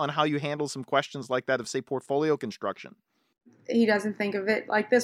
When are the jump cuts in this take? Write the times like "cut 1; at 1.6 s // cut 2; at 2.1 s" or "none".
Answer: none